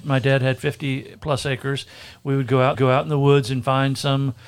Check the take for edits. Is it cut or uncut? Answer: cut